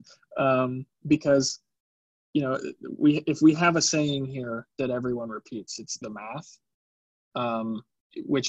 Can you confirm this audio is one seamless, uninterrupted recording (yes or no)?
no